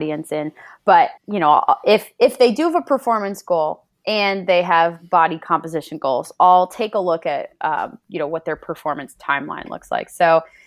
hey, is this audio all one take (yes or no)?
no